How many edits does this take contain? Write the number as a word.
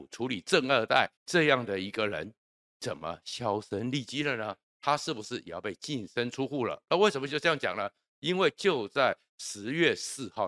one